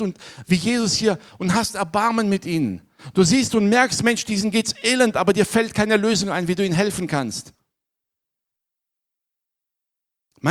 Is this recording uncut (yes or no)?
yes